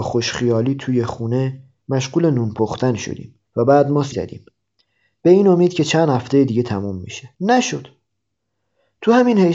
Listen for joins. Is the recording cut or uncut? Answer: cut